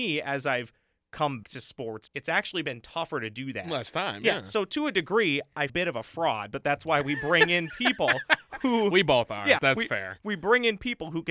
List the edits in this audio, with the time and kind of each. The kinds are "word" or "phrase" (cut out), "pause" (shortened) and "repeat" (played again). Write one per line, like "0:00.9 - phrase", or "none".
0:01.4 - word
0:02.1 - word
0:05.7 - phrase
0:09.6 - word